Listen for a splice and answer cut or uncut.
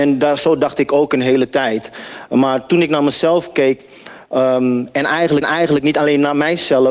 cut